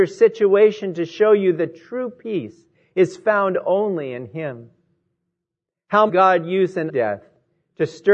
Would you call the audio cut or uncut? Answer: cut